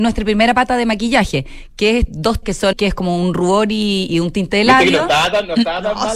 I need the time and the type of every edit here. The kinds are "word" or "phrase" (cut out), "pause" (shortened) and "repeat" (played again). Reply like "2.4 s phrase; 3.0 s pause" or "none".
2.1 s word; 2.4 s word; 2.7 s word; 4.1 s word